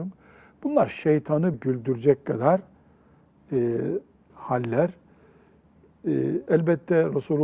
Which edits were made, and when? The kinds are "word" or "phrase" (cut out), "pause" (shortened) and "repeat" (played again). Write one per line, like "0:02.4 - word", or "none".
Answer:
0:01.5 - word
0:04.3 - word

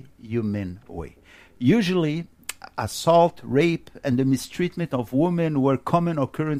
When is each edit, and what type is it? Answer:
none

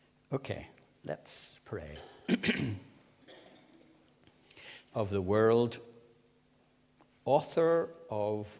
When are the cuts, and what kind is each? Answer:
0:04.9 - word

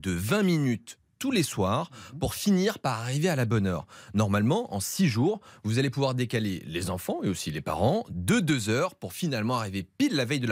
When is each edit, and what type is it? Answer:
none

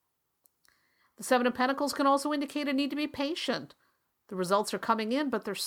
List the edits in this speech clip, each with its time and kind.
none

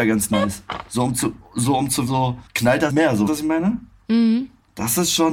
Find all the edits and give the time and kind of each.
0:01.4 - pause
0:02.1 - word
0:02.9 - word
0:03.3 - word

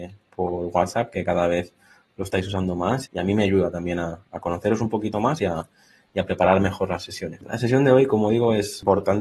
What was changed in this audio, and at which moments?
0:03.1 - word

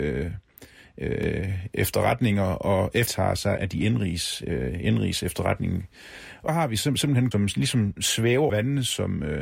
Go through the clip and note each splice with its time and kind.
0:03.1 - word
0:03.6 - word
0:06.5 - word
0:07.3 - word
0:08.5 - word

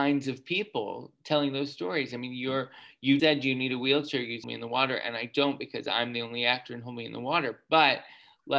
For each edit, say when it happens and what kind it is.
0:03.2 - word
0:04.4 - phrase

